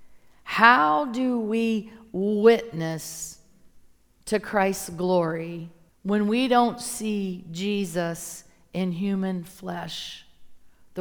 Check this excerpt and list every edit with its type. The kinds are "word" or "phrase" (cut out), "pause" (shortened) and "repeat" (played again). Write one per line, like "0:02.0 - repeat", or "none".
0:04.0 - pause
0:05.9 - pause